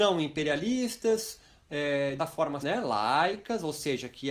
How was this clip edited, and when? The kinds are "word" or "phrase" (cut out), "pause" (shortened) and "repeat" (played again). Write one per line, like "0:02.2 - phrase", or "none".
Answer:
0:02.2 - word
0:02.6 - word